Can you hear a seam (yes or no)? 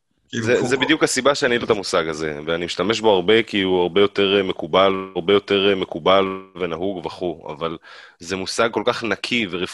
yes